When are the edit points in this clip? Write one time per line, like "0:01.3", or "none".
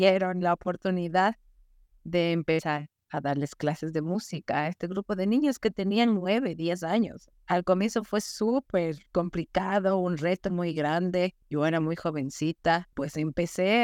0:09.1